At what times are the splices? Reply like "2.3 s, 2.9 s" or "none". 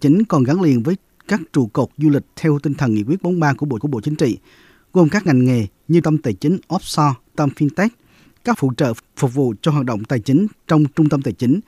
3.8 s, 5.3 s, 6.0 s, 7.3 s, 8.5 s